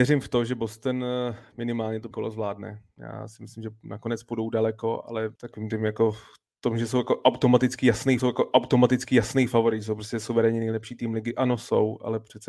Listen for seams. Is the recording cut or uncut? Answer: cut